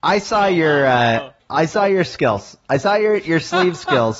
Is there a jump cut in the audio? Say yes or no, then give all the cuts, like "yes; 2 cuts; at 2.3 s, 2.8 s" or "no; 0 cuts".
yes; 1 cut; at 1.4 s